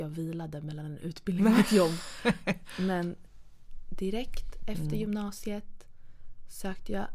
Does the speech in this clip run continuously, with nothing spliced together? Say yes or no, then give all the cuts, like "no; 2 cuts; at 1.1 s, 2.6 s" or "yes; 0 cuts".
yes; 0 cuts